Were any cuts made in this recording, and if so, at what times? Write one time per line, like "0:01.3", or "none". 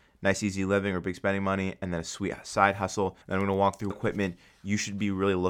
0:03.2
0:03.9